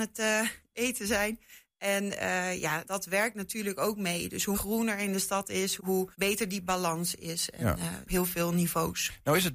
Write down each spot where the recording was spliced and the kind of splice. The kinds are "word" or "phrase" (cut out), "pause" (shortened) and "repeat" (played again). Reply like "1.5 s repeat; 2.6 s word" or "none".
2.8 s word; 4.5 s word; 5.8 s word; 6.1 s pause; 8.1 s phrase